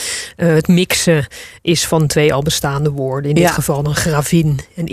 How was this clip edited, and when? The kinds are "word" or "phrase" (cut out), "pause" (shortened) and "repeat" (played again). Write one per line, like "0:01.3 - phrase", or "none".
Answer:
none